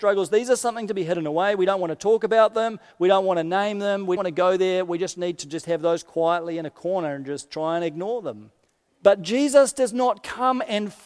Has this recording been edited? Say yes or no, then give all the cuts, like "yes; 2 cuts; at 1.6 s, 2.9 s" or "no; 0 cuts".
yes; 2 cuts; at 4.2 s, 8.7 s